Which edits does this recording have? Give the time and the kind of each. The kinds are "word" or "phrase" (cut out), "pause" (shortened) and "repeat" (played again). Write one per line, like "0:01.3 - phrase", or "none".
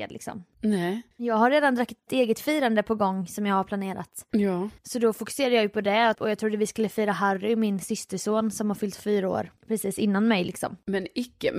0:01.1 - pause
0:02.1 - word
0:04.8 - pause
0:06.1 - word
0:09.6 - pause